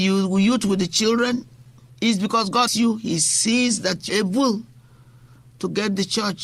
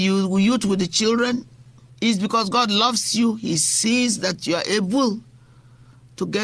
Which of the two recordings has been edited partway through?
first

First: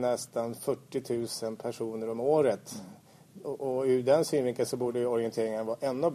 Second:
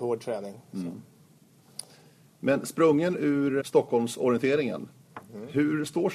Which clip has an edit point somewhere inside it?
second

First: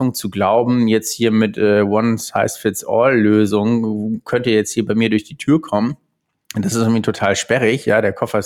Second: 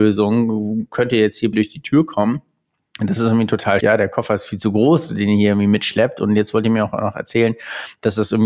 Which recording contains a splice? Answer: second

